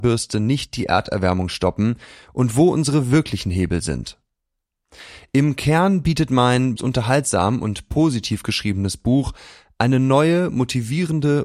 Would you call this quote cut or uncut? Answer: cut